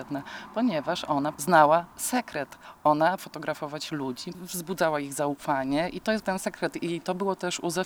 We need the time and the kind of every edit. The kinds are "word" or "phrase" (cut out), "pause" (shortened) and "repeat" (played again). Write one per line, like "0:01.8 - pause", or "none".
0:01.9 - word
0:03.2 - word
0:04.3 - word
0:06.2 - word